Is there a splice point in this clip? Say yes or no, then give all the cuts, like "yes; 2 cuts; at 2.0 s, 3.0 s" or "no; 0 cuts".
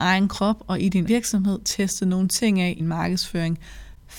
yes; 2 cuts; at 1.1 s, 2.8 s